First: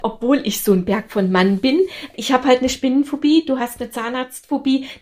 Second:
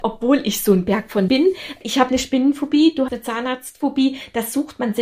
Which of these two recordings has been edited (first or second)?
second